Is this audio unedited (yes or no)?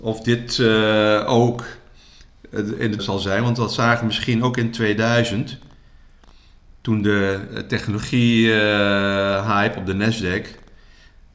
no